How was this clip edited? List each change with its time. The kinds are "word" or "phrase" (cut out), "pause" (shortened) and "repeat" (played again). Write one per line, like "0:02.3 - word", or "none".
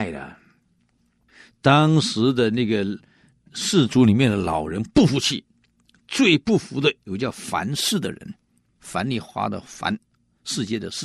0:08.8 - word